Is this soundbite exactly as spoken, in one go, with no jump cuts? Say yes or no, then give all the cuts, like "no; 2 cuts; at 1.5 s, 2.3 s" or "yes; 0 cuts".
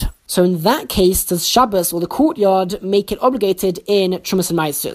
yes; 0 cuts